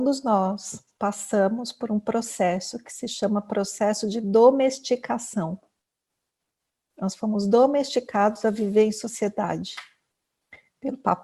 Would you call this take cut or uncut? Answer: uncut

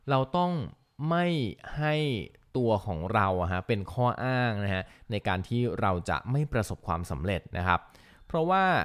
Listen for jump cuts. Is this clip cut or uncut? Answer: uncut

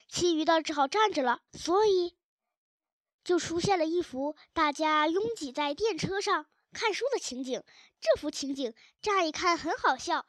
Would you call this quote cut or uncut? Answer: cut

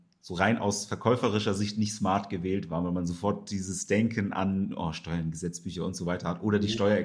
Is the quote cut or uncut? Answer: uncut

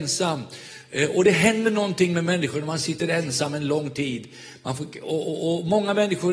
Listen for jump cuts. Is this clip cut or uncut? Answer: uncut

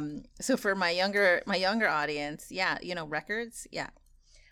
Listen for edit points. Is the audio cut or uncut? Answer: uncut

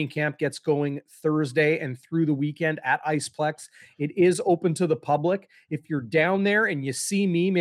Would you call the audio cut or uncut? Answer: uncut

